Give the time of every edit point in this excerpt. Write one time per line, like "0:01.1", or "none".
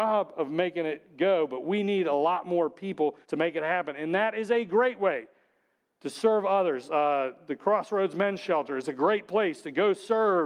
0:03.2

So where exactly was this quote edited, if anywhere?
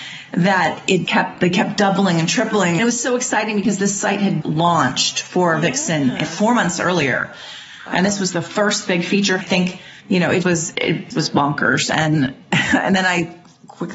0:01.1
0:04.4
0:06.2
0:09.4
0:10.0
0:10.4
0:10.7
0:11.1

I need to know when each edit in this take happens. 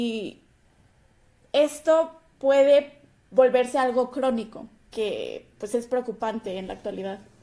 0:04.8

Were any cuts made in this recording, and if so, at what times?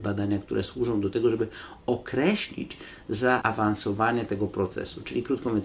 none

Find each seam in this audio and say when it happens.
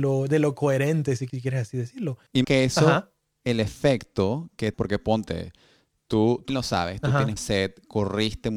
0:01.3
0:02.4
0:04.7
0:06.5
0:07.4

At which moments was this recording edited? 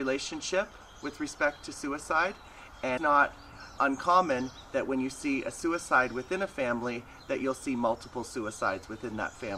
0:03.0
0:03.8

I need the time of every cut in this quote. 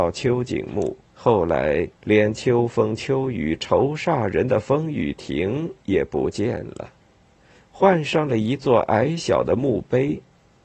0:01.1
0:01.9

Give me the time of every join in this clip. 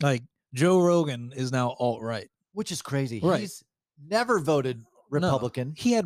none

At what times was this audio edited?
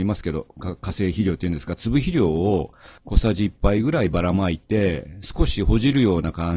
0:03.0

